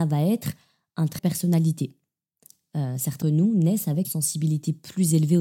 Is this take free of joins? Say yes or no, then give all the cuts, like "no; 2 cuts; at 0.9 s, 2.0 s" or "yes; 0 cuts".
no; 3 cuts; at 1.2 s, 3.2 s, 4.0 s